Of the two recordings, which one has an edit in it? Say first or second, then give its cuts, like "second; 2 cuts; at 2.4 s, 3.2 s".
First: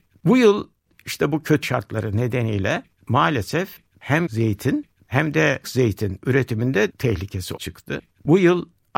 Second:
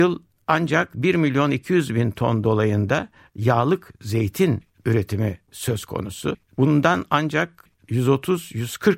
first; 5 cuts; at 1.6 s, 4.3 s, 5.6 s, 6.9 s, 7.6 s